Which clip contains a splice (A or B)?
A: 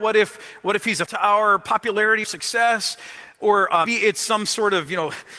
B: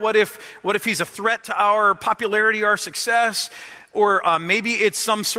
A